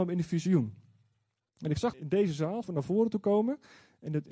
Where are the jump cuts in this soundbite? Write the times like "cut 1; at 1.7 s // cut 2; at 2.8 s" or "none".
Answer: cut 1; at 1.9 s // cut 2; at 2.6 s